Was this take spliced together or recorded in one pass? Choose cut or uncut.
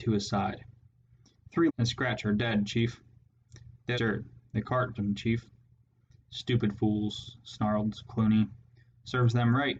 cut